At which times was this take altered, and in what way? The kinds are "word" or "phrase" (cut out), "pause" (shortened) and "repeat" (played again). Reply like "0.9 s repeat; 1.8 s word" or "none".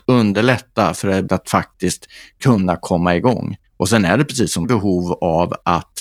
1.3 s word; 3.7 s pause; 4.6 s phrase

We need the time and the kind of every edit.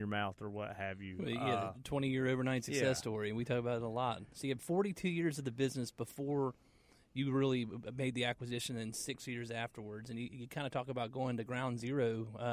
none

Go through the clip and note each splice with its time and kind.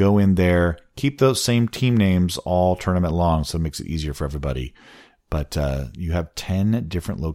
none

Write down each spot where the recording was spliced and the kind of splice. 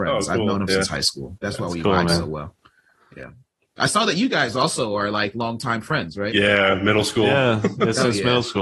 1.4 s word

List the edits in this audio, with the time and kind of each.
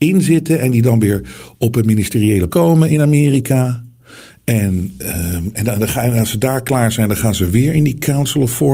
2.5 s word

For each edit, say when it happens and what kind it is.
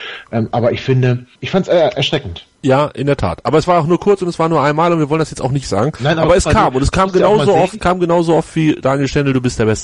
1.3 s pause; 2.5 s pause; 5.6 s phrase; 7.8 s word

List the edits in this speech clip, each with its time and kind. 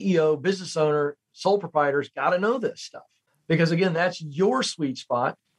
none

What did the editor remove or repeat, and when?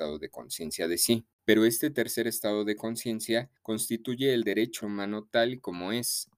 3.6 s pause; 4.8 s phrase

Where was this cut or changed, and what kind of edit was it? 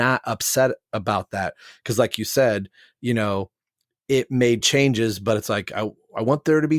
none

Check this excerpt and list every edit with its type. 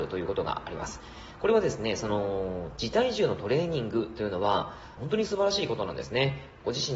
5.0 s phrase

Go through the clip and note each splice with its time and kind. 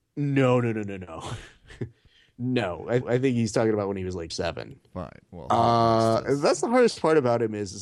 3.0 s repeat; 4.3 s phrase; 5.3 s pause

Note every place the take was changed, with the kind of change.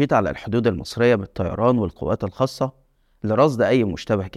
none

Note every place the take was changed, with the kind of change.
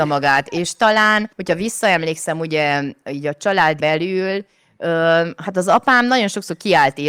3.8 s word

